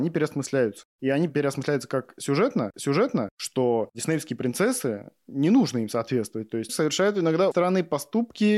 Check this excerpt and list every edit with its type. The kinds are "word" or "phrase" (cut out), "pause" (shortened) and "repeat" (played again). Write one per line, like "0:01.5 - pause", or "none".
0:02.7 - repeat
0:06.7 - word
0:07.5 - word